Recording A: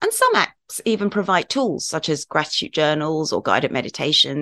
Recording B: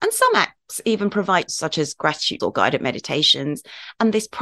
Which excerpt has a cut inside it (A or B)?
B